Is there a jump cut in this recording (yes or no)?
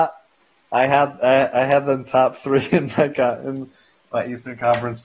no